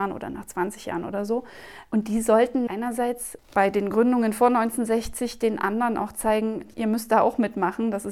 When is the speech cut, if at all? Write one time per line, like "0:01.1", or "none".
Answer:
0:02.7
0:03.4
0:06.7